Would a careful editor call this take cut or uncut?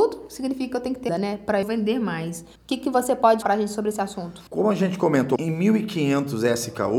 cut